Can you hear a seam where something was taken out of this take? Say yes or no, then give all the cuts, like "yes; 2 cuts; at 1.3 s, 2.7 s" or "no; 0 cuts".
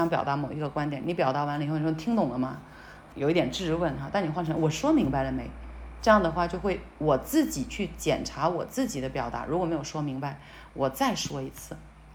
yes; 1 cut; at 3.1 s